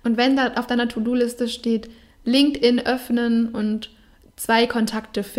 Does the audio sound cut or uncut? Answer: uncut